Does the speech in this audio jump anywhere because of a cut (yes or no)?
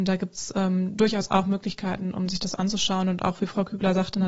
no